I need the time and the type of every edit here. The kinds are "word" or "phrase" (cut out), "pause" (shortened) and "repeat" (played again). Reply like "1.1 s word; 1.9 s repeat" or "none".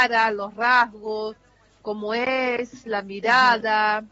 none